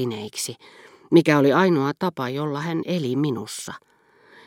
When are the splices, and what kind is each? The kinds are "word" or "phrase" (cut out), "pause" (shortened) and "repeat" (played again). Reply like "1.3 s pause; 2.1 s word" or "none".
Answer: none